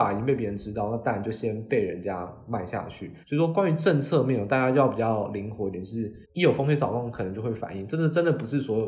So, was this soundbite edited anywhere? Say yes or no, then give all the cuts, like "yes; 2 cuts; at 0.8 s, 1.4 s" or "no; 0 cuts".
yes; 2 cuts; at 3.2 s, 6.2 s